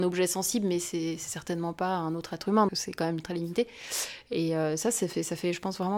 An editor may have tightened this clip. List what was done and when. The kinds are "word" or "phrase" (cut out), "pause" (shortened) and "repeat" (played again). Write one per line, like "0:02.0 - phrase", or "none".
0:02.7 - word